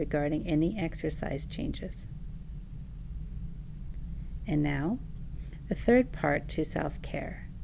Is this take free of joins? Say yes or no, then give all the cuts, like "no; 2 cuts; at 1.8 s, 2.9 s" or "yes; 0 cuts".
yes; 0 cuts